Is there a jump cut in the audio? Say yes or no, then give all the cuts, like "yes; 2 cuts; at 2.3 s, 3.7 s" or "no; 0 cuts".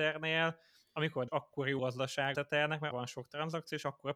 yes; 4 cuts; at 1.3 s, 1.8 s, 2.3 s, 2.9 s